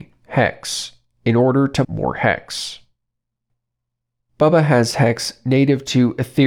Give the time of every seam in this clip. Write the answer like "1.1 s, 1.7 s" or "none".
1.8 s